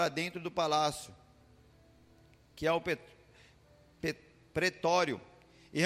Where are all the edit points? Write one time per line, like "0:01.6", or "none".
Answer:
none